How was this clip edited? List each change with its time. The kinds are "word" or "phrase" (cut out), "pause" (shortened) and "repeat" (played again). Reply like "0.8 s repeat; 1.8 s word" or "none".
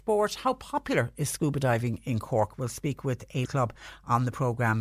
3.5 s word